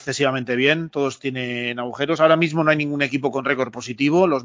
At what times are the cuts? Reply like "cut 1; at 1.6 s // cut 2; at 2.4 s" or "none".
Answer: none